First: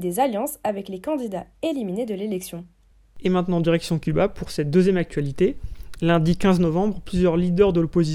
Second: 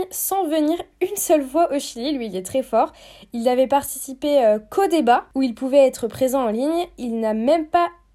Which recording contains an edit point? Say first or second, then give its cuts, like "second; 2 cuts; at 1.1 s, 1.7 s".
first; 1 cut; at 2.9 s